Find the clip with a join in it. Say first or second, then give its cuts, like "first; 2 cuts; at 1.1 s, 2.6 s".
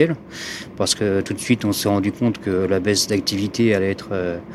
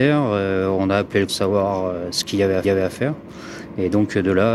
second; 2 cuts; at 1.3 s, 2.6 s